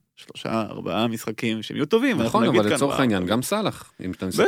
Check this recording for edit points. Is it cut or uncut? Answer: uncut